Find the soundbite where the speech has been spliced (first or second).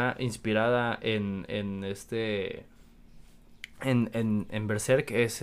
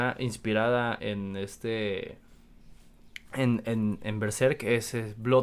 second